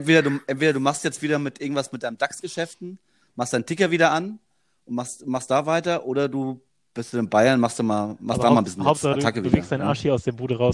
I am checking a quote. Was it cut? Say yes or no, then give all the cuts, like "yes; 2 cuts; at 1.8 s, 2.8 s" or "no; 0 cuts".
no; 0 cuts